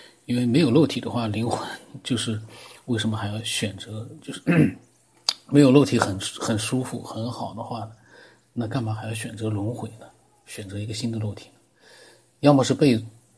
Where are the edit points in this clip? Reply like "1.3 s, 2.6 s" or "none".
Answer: none